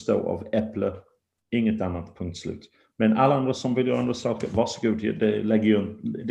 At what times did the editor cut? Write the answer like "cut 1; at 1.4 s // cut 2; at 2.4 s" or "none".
none